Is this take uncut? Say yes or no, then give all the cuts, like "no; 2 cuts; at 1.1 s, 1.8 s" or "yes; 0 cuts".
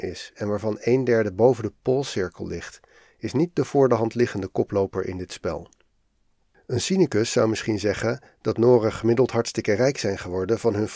yes; 0 cuts